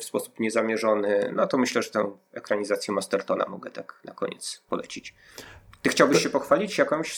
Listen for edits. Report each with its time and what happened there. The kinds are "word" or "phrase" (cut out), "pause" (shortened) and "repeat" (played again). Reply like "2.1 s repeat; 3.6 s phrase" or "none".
none